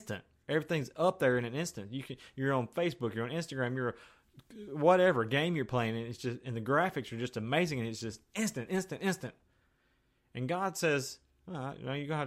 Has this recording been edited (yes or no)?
no